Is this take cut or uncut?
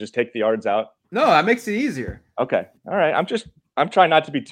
cut